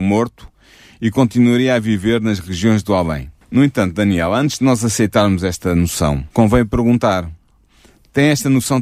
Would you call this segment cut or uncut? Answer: cut